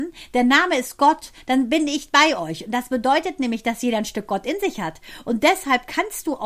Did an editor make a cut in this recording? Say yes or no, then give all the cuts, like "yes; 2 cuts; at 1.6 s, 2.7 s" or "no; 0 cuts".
no; 0 cuts